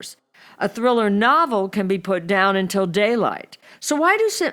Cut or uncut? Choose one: uncut